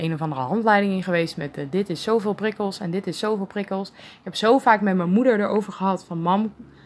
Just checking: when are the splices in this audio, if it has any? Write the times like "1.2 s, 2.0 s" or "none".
none